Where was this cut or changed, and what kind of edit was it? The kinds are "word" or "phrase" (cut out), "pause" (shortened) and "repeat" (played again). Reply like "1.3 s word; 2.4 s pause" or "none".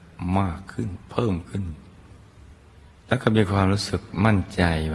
3.0 s pause